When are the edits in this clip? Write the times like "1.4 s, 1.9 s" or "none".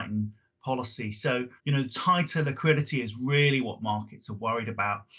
1.6 s